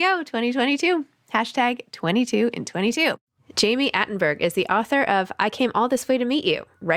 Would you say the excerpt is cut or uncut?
uncut